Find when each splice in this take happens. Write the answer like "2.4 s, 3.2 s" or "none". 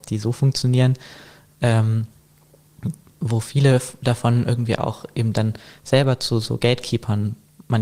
none